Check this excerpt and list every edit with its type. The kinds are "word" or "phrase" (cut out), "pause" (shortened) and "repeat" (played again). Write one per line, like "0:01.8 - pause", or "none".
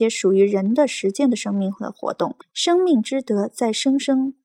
0:02.4 - pause

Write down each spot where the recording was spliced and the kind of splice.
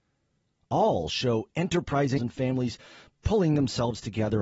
0:02.2 - word

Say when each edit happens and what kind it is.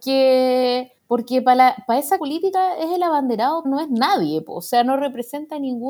0:01.0 - pause
0:02.2 - word
0:03.6 - word

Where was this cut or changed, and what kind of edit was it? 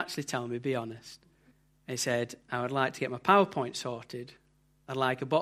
0:01.5 - pause

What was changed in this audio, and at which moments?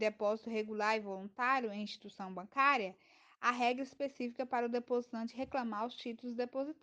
none

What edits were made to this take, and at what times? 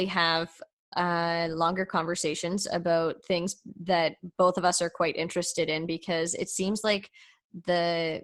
none

